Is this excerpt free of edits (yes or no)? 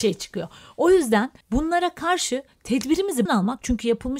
no